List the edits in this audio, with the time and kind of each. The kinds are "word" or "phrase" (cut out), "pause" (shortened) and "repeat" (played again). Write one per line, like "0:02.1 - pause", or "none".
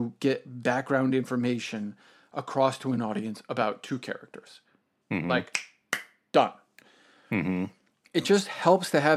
none

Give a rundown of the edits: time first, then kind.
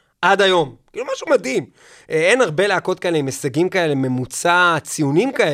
none

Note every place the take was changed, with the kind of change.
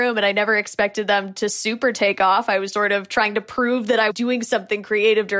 0:02.7 - word
0:04.1 - word

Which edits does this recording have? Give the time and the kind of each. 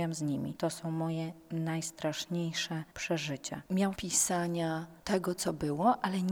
0:03.9 - phrase

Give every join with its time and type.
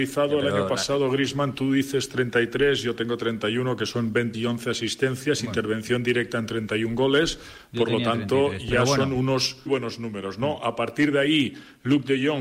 0:04.3 - word
0:09.7 - word

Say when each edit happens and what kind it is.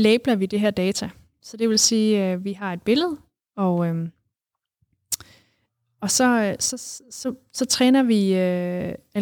none

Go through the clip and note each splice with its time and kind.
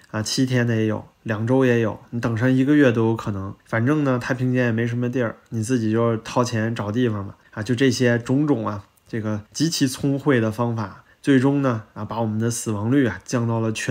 0:03.6 - pause
0:09.5 - pause
0:11.1 - pause

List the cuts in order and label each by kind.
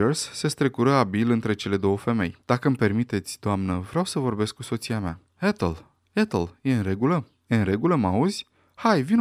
0:02.4 - pause
0:05.3 - pause

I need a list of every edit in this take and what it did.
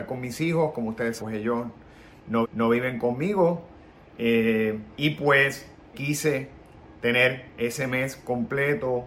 0:01.2 - word
0:02.4 - repeat
0:04.9 - pause
0:05.9 - word

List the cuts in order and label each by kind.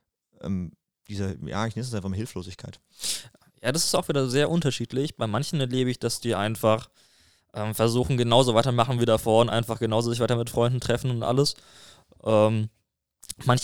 none

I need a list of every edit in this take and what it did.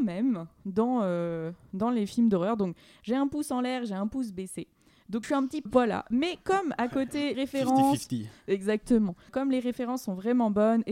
0:05.2 - word
0:05.7 - word
0:07.3 - word
0:09.3 - word

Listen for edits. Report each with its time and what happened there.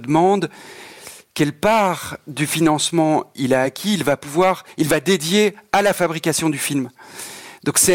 none

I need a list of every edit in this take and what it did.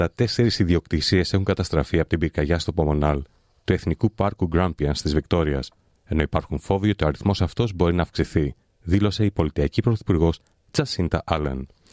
none

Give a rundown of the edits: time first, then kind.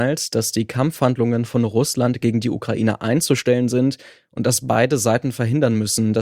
none

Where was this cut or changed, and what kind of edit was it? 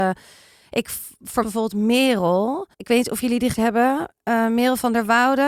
0:01.4 - phrase
0:02.7 - pause
0:03.5 - word
0:04.2 - pause

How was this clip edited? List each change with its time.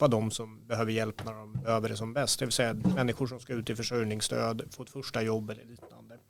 none

